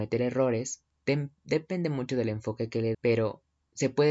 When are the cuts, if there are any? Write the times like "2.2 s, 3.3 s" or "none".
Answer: 0.9 s, 2.9 s